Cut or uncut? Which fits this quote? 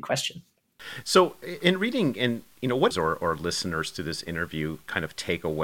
cut